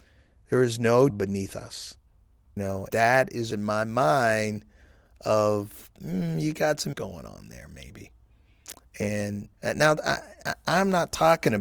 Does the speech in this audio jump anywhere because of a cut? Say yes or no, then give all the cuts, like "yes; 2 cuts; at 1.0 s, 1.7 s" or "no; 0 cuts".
yes; 6 cuts; at 1.1 s, 2.6 s, 2.9 s, 3.5 s, 6.9 s, 9.5 s